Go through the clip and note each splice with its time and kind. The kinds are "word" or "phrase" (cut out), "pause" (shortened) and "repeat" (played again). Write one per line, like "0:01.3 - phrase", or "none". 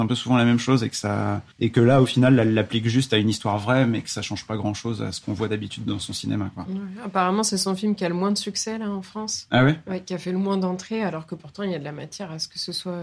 0:01.5 - pause